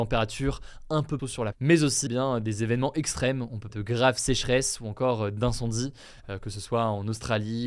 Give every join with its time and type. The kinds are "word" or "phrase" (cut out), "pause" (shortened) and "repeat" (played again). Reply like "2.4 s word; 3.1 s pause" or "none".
1.2 s word; 1.5 s word; 2.1 s word; 3.7 s word